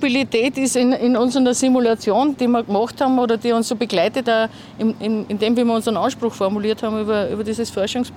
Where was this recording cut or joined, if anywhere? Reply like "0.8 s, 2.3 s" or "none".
2.3 s, 4.2 s